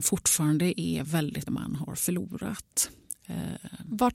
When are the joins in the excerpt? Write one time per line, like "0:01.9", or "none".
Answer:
0:01.5